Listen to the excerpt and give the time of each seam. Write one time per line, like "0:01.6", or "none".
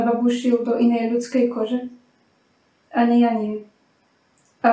none